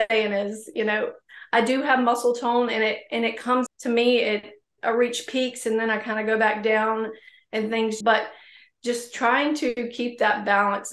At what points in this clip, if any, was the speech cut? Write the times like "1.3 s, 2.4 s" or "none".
3.7 s, 4.8 s, 8.0 s